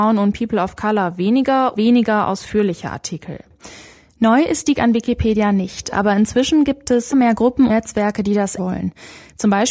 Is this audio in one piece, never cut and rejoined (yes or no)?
no